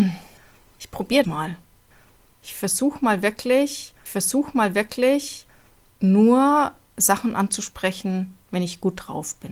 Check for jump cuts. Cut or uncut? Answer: cut